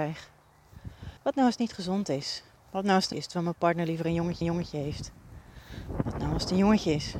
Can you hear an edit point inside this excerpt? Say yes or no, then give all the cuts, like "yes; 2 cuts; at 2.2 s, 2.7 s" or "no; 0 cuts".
yes; 4 cuts; at 1.2 s, 2.6 s, 3.1 s, 4.4 s